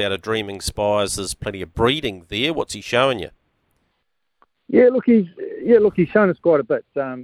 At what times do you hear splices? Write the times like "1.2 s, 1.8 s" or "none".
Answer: none